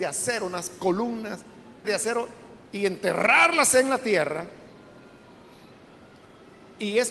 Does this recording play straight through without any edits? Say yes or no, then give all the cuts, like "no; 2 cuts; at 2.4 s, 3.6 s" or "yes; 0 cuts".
no; 1 cut; at 1.8 s